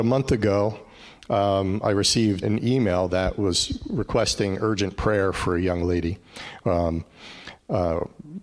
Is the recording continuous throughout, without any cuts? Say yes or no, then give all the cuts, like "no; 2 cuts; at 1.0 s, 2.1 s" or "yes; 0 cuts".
no; 1 cut; at 2.4 s